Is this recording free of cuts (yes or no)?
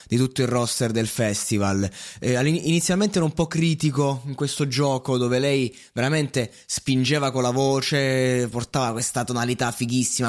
yes